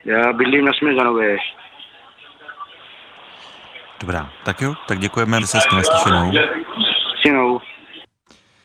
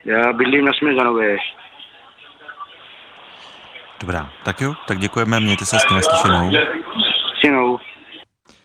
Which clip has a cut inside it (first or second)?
first